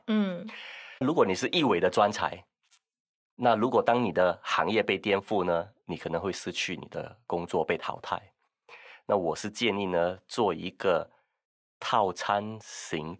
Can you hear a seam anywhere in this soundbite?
yes; 1 cut; at 1.0 s

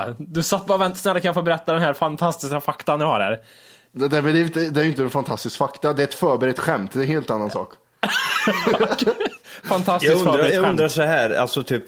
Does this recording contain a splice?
no; 0 cuts

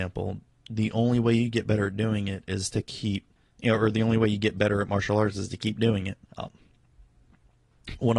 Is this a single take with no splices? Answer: no; 2 cuts; at 3.4 s, 6.3 s

